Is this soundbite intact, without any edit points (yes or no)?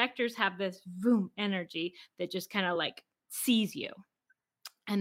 yes